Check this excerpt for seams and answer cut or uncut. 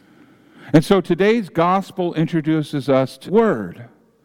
cut